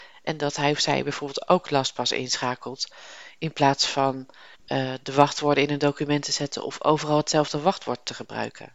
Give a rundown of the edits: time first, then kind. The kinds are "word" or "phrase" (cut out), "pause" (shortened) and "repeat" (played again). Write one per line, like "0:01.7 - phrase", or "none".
0:04.5 - pause